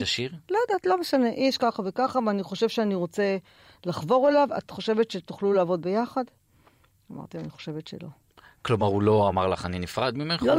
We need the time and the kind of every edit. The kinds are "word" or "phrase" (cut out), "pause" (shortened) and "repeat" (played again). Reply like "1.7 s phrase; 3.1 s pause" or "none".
none